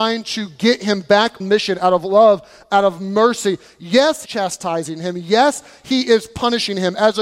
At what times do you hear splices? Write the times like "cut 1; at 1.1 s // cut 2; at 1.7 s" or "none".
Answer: cut 1; at 1.4 s // cut 2; at 4.2 s